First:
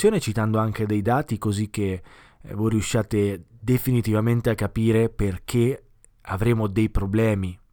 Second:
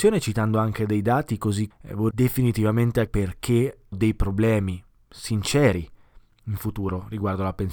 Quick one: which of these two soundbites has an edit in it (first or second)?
second